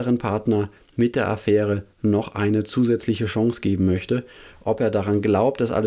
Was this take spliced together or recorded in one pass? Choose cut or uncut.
uncut